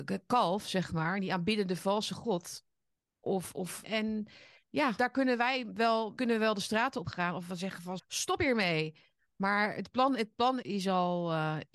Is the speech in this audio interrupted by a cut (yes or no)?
yes